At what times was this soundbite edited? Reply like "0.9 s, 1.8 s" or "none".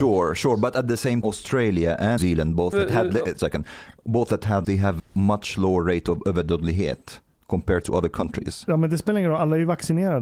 1.2 s, 2.2 s, 2.7 s, 3.4 s, 4.6 s, 5.0 s